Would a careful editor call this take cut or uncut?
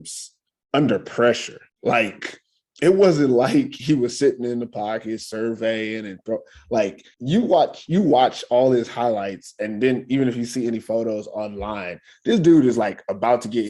cut